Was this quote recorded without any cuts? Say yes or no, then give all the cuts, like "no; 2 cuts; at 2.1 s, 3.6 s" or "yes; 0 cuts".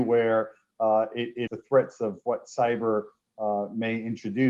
no; 1 cut; at 1.5 s